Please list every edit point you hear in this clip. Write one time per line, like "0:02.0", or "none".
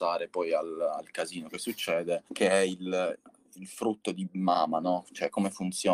0:02.3